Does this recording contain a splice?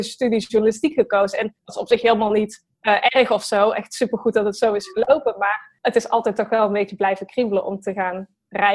yes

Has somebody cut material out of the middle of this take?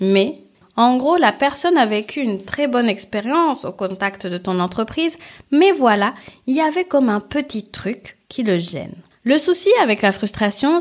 yes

